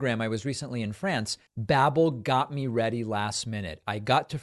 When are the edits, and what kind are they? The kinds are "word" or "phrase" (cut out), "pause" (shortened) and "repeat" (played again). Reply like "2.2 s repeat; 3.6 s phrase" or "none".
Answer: 1.5 s pause